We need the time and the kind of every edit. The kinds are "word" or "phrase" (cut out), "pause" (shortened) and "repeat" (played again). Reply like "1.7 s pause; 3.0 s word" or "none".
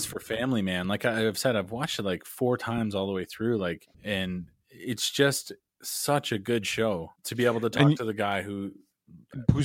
3.9 s pause; 7.2 s pause